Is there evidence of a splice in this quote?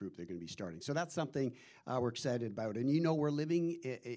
no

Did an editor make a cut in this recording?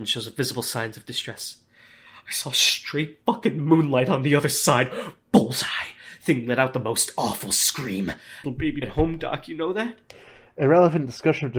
yes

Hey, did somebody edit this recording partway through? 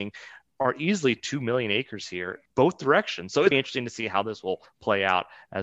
yes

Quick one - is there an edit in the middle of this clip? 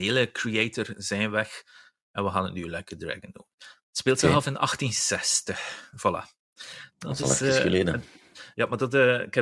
no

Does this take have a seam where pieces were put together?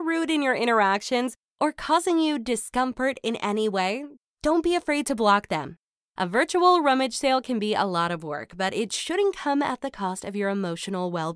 no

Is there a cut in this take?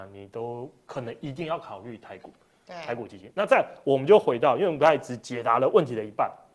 no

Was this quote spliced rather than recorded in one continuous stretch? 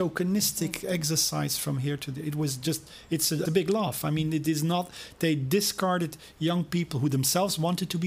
yes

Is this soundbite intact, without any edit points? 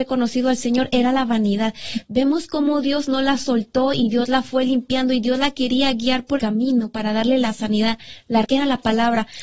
no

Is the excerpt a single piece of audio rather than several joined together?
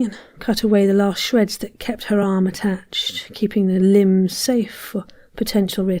yes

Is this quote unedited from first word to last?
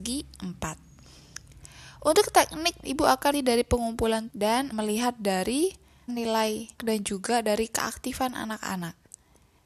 no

